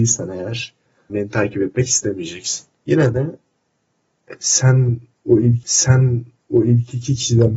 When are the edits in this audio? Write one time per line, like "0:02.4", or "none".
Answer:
0:01.1
0:02.7
0:05.6

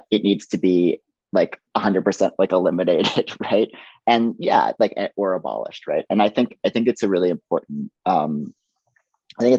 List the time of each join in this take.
0:01.7
0:08.0

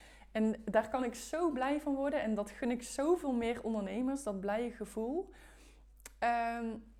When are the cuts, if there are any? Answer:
none

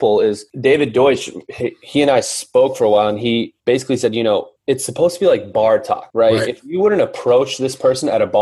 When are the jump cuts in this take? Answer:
0:03.6

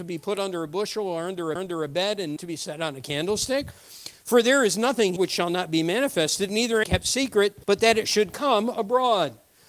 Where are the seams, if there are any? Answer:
0:01.6
0:02.4
0:05.2
0:06.8
0:07.6

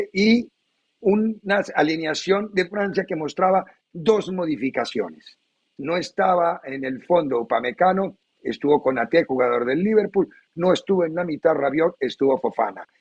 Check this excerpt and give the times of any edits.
none

